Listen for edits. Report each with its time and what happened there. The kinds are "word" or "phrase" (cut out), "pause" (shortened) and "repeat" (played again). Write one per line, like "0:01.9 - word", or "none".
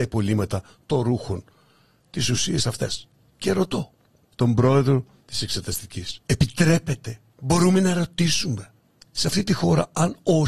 0:06.2 - pause